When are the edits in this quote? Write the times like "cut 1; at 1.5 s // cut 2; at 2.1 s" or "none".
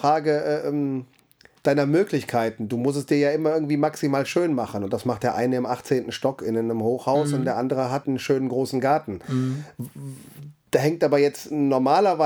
cut 1; at 1.6 s // cut 2; at 8.0 s